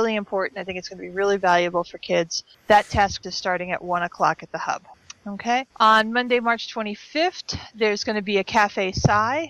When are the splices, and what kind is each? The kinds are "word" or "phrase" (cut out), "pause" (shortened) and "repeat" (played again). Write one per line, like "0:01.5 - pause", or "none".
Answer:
0:03.2 - word
0:05.7 - pause